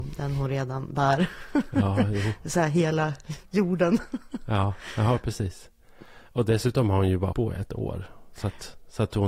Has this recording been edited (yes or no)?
yes